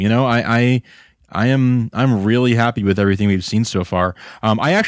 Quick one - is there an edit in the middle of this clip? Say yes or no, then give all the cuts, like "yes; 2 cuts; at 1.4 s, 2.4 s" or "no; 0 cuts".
no; 0 cuts